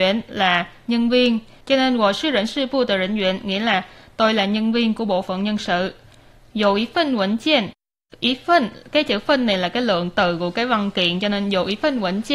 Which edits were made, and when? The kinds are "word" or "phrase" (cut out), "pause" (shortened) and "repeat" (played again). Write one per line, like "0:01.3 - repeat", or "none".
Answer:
none